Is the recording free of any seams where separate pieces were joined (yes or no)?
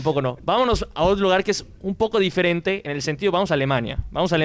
yes